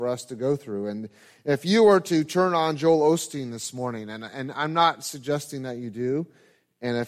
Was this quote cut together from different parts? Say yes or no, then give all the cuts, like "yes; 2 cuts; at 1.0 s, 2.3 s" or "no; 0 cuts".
no; 0 cuts